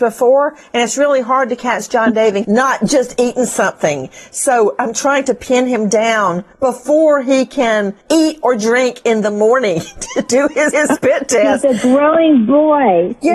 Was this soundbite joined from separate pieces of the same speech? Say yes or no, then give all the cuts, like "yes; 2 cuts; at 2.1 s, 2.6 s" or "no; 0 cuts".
yes; 4 cuts; at 2.4 s, 6.5 s, 8.0 s, 10.7 s